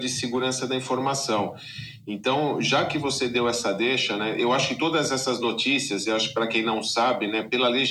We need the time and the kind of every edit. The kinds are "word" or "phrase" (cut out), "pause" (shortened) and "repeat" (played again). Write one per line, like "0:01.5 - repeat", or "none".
none